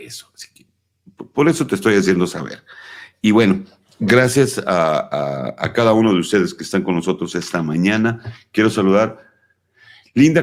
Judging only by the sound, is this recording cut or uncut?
uncut